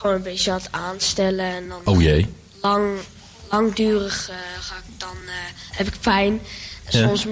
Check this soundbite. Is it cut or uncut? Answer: uncut